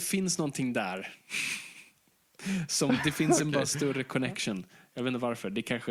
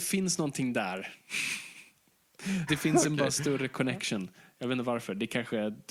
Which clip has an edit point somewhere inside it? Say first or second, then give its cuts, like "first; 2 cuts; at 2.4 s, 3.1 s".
second; 1 cut; at 2.7 s